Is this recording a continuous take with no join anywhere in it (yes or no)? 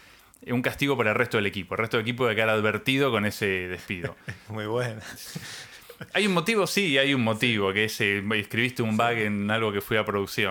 yes